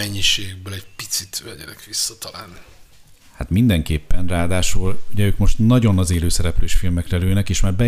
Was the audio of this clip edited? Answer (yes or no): no